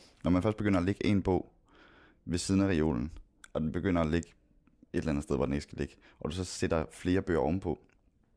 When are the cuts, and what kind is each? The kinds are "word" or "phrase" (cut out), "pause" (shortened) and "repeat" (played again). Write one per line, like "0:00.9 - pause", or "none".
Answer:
none